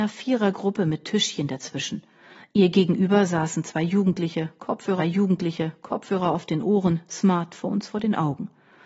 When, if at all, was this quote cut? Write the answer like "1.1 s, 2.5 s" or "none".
5.0 s